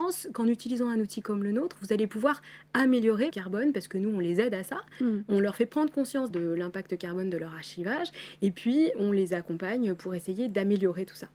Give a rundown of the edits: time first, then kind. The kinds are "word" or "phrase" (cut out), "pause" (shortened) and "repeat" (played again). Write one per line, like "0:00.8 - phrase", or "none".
0:03.3 - phrase
0:06.3 - word
0:08.9 - word